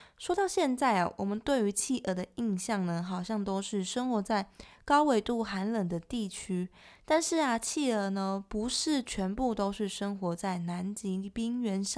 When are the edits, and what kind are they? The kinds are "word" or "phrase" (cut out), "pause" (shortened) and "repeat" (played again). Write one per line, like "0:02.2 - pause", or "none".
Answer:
none